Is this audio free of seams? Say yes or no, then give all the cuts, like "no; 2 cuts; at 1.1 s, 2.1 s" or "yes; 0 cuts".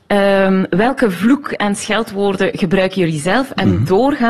yes; 0 cuts